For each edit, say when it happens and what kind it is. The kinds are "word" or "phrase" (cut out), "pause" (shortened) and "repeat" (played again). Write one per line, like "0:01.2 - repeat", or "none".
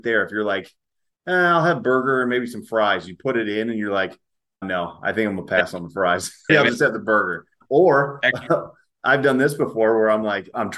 0:06.5 - word